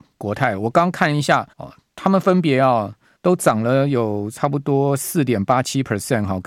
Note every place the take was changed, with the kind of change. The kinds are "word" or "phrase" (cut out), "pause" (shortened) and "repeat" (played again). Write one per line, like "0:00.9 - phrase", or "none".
0:01.5 - pause
0:03.2 - pause